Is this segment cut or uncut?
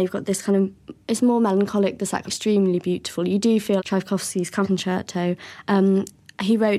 cut